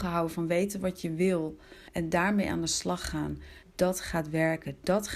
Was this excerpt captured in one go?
no; 2 cuts; at 1.9 s, 3.6 s

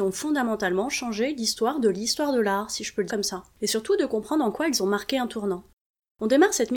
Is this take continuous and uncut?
no; 1 cut; at 3.1 s

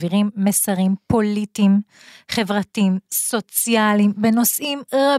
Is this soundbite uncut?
yes; 0 cuts

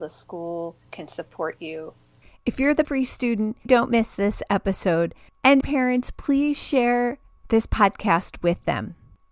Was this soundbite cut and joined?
yes; 4 cuts; at 0.9 s, 2.8 s, 3.7 s, 5.6 s

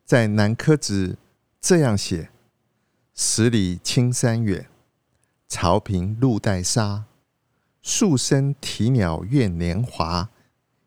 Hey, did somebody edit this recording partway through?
no; 0 cuts

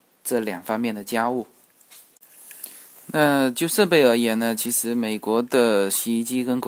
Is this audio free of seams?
yes; 0 cuts

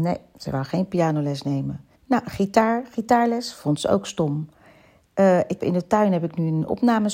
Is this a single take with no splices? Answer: no; 2 cuts; at 2.0 s, 5.6 s

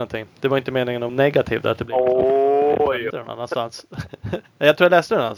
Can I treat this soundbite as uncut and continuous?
no; 2 cuts; at 1.1 s, 3.1 s

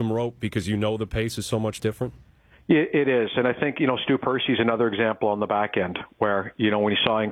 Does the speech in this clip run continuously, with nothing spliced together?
yes; 0 cuts

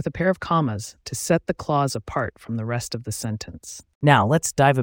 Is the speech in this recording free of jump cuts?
yes; 0 cuts

